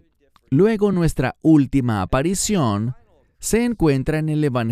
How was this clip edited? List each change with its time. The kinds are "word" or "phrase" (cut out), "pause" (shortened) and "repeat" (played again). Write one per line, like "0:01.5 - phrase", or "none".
none